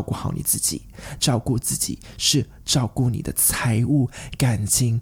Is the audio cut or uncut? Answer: uncut